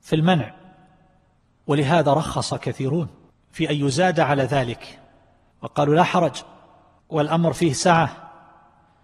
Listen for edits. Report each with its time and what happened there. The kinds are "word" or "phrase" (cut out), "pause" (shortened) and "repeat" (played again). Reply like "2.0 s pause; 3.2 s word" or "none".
none